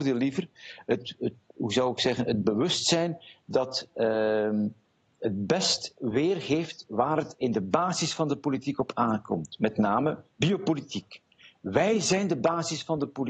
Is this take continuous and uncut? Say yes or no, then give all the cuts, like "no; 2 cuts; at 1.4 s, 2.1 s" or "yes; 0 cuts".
yes; 0 cuts